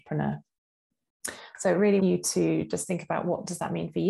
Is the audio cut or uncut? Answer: cut